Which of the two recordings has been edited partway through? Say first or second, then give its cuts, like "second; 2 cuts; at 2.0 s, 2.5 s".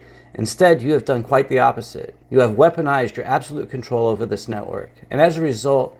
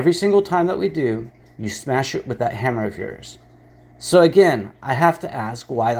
first; 1 cut; at 2.2 s